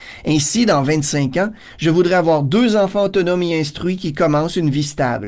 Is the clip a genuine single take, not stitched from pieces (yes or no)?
yes